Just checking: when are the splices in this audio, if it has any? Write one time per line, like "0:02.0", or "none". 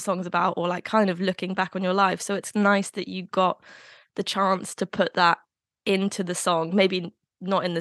none